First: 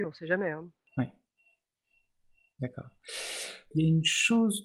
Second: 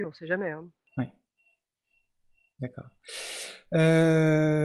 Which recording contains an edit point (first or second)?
first